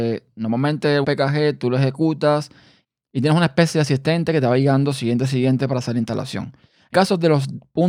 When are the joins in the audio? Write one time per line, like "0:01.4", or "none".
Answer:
0:01.0
0:06.9